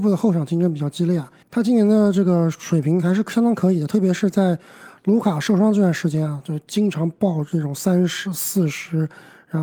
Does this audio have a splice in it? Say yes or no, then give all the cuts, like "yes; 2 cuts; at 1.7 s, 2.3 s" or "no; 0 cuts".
yes; 1 cut; at 1.4 s